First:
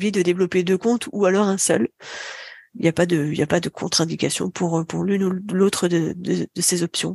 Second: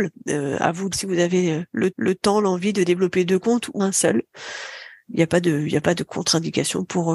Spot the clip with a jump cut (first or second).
second